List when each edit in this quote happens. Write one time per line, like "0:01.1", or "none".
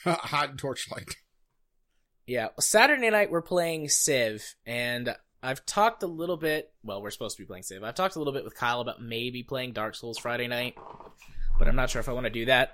0:05.3